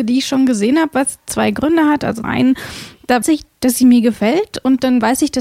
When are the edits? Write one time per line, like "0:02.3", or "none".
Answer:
0:02.2
0:03.2